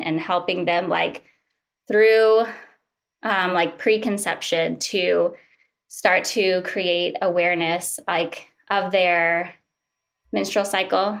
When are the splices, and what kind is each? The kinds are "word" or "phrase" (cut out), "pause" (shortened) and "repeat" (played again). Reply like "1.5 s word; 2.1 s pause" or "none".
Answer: none